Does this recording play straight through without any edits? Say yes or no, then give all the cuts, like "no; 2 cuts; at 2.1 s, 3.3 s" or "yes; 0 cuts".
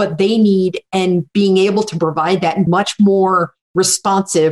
no; 1 cut; at 2.7 s